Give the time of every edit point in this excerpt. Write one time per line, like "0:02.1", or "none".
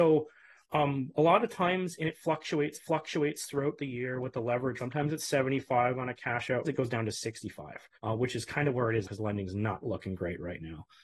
0:02.7
0:04.8
0:06.6
0:07.9
0:09.0